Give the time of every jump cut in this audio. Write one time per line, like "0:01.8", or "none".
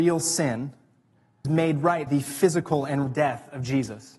0:01.4
0:02.1
0:03.1